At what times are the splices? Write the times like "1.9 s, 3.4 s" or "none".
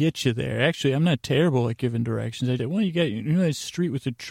2.6 s